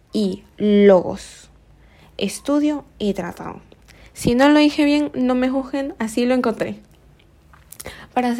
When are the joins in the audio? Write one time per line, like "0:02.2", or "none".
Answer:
none